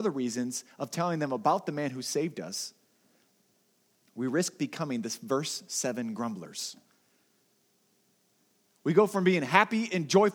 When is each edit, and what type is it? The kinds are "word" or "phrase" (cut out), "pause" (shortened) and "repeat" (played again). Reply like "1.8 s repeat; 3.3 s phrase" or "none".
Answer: none